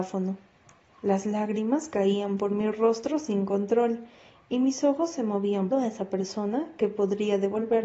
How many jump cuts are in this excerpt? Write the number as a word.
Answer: one